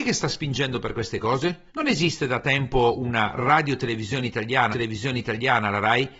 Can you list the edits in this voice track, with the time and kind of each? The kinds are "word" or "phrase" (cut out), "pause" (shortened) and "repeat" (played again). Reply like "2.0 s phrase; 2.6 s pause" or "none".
1.7 s pause; 4.7 s repeat